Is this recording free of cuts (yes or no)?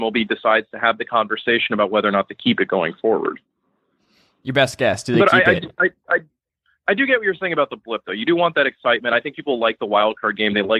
yes